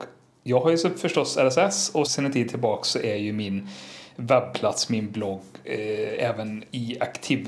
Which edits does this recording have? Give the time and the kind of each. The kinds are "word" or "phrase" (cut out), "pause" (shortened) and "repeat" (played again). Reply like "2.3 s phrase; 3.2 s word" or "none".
2.1 s word

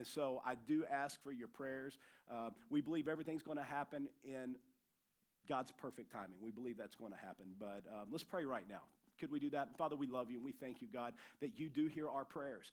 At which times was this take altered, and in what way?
none

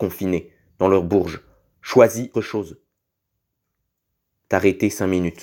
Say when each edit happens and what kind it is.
2.3 s word

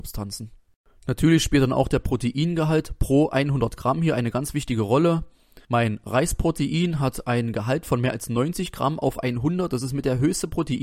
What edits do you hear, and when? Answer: 5.6 s pause

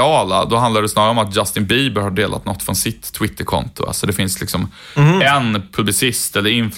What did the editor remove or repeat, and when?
none

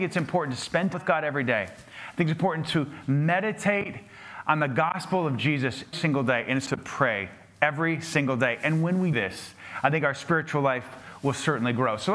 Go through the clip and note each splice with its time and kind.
0.9 s word; 5.9 s word; 6.7 s word; 9.1 s word

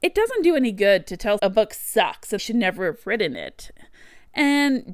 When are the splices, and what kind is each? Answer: 1.4 s word; 2.4 s word

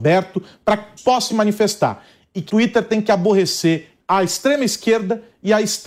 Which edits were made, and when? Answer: 1.0 s word; 1.3 s word; 2.5 s word; 4.0 s word

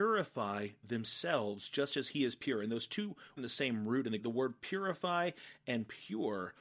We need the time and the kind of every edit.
3.4 s phrase; 4.2 s phrase

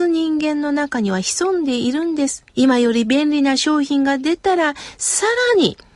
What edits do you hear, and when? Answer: 2.5 s pause

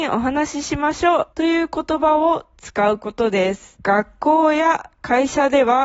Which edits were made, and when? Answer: 1.3 s pause; 3.8 s pause

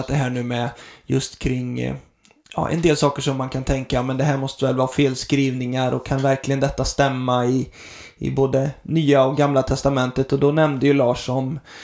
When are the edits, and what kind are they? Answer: none

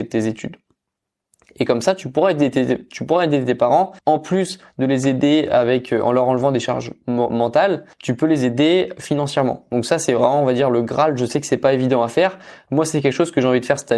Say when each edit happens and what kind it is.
4.0 s pause; 7.9 s pause

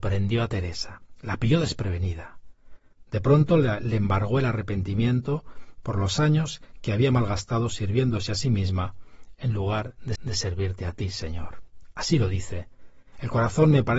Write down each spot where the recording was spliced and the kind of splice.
10.1 s repeat

